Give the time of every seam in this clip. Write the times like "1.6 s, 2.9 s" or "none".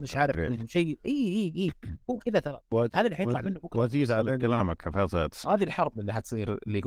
2.6 s